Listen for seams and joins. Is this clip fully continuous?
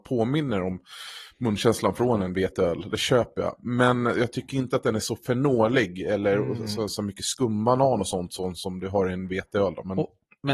yes; 0 cuts

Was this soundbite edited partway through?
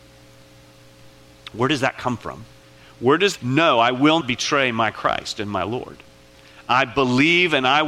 yes; 3 cuts; at 2.6 s, 3.4 s, 4.2 s

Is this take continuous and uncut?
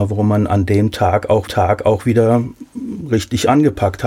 no; 1 cut; at 1.5 s

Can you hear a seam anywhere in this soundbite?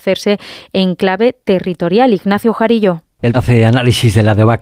yes; 1 cut; at 3.3 s

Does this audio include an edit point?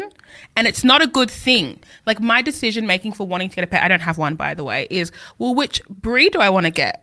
no; 0 cuts

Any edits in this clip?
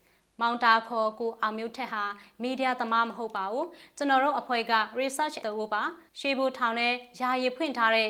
yes; 2 cuts; at 5.4 s, 6.1 s

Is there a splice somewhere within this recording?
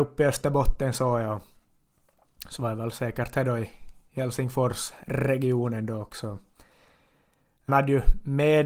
yes; 1 cut; at 7.7 s

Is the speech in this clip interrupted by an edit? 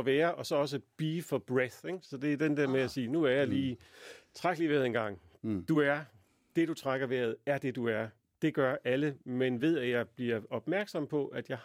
no; 0 cuts

